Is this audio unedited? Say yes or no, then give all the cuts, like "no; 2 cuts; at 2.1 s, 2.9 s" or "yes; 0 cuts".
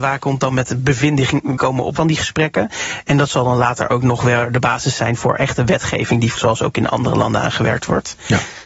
no; 3 cuts; at 1.6 s, 2.0 s, 6.4 s